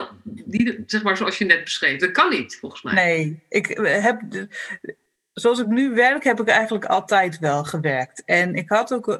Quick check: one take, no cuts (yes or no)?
yes